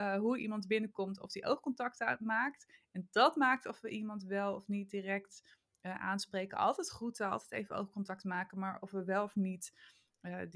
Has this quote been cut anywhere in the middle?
no; 0 cuts

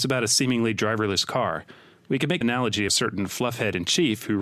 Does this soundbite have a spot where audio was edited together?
yes; 2 cuts; at 2.4 s, 2.9 s

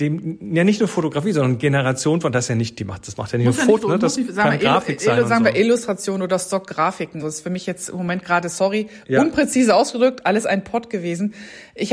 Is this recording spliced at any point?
yes; 2 cuts; at 3.8 s, 7.2 s

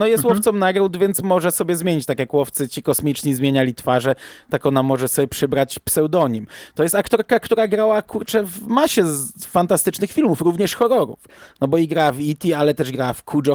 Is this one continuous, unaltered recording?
yes; 0 cuts

